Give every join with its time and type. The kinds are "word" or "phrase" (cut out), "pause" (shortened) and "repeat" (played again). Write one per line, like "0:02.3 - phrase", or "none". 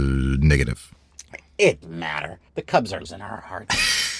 0:01.8 - word
0:02.5 - pause
0:03.0 - word